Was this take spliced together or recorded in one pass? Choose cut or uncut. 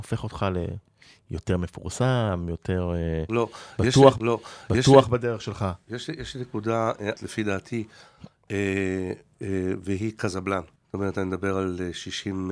cut